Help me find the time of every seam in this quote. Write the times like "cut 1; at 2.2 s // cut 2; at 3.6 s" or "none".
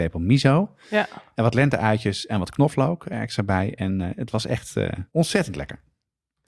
cut 1; at 5.1 s

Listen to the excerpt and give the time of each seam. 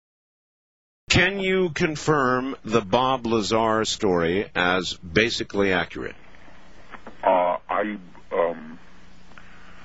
none

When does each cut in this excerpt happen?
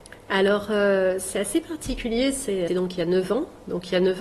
cut 1; at 2.7 s

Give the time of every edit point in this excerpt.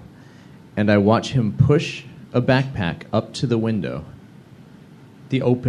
none

